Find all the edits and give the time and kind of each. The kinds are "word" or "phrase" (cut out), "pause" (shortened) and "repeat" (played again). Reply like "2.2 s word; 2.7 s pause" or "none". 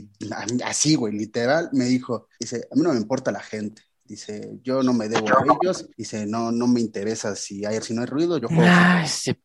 2.3 s pause; 5.9 s pause; 6.5 s word; 7.8 s word; 8.4 s word